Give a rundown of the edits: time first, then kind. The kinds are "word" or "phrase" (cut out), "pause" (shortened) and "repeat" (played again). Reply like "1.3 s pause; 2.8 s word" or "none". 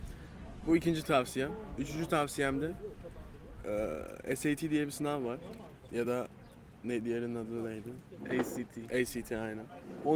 none